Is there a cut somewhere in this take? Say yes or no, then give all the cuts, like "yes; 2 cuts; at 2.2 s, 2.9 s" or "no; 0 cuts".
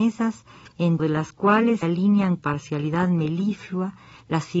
yes; 3 cuts; at 1.0 s, 1.8 s, 2.4 s